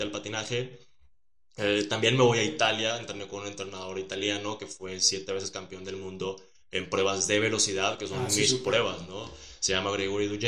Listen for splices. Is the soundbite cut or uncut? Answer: uncut